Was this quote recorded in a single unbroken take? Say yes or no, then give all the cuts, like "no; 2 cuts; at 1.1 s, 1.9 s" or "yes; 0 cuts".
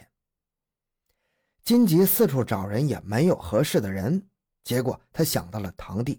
yes; 0 cuts